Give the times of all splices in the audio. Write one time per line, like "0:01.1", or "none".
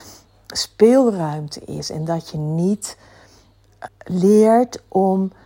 0:03.9